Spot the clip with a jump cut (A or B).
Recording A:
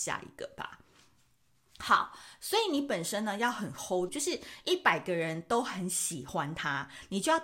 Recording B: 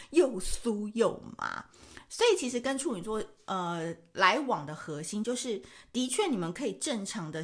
A